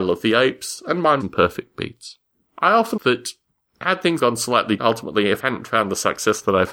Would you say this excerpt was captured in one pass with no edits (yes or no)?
no